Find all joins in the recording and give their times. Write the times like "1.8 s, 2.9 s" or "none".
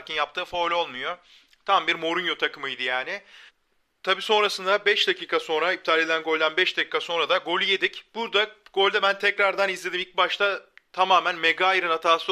3.5 s